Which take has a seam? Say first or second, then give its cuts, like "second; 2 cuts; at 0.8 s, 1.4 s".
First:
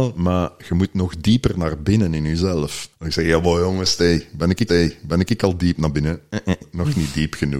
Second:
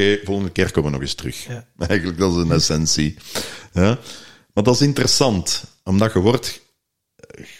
first; 3 cuts; at 2.9 s, 4.7 s, 6.6 s